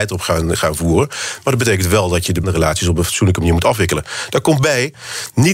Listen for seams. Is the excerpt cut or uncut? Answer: cut